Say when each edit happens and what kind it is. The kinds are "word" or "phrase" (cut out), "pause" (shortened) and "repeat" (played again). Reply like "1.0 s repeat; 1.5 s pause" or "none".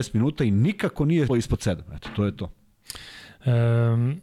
1.3 s word